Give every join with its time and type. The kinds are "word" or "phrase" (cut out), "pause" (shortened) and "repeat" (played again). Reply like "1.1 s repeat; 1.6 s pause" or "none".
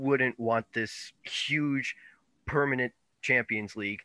1.2 s pause